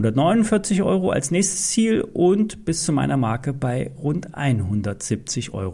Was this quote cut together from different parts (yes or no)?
no